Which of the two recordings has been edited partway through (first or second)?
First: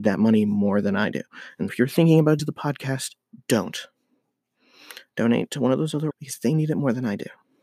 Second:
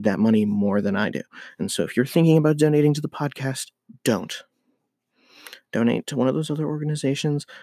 first